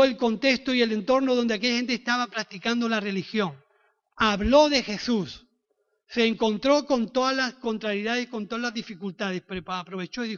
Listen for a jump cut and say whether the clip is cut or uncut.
uncut